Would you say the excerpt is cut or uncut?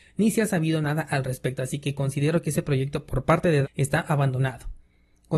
cut